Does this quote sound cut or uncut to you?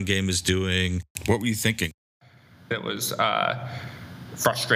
uncut